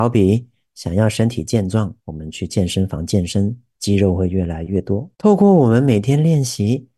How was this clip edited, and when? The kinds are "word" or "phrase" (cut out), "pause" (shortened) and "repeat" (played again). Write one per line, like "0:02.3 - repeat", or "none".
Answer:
0:02.0 - pause
0:05.1 - pause